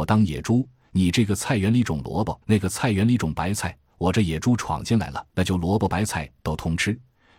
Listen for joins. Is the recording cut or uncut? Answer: cut